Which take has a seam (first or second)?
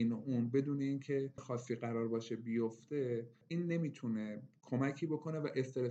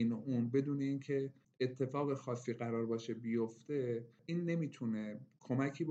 first